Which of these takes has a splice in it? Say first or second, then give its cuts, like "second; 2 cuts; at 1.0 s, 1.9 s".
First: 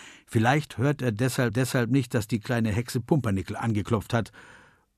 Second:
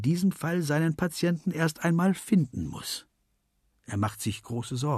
first; 1 cut; at 1.5 s